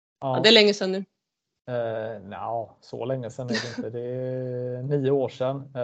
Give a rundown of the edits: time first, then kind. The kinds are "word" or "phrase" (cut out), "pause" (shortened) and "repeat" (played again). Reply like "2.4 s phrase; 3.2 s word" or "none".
none